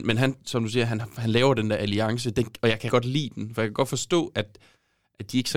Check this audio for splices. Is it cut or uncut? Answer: cut